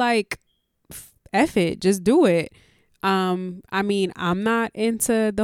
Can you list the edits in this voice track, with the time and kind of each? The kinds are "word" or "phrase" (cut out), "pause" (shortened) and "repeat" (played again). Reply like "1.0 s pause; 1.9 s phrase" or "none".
none